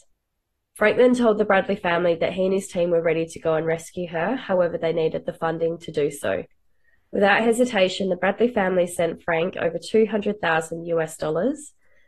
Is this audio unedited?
yes; 0 cuts

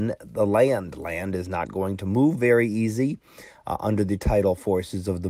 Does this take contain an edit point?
no; 0 cuts

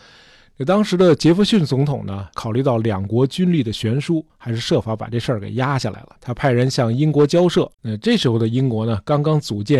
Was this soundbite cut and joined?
yes; 3 cuts; at 2.3 s, 6.2 s, 7.7 s

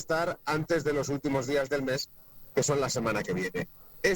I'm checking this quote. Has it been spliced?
no; 0 cuts

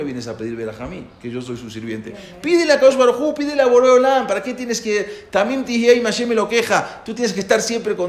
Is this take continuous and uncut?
yes; 0 cuts

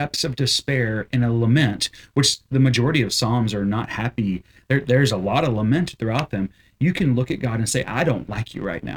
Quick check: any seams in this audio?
no; 0 cuts

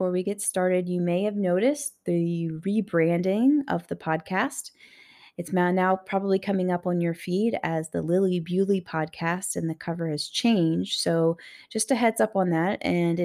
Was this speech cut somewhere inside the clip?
no; 0 cuts

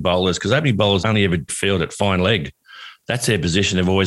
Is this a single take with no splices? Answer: no; 2 cuts; at 1.0 s, 1.5 s

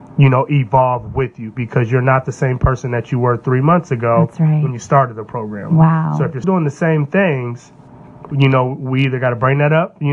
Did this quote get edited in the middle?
yes; 2 cuts; at 6.4 s, 8.3 s

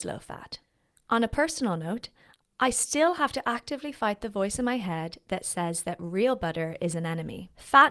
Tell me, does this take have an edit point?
no; 0 cuts

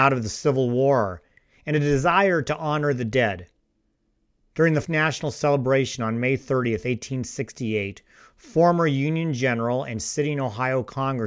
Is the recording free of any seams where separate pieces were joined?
no; 1 cut; at 4.8 s

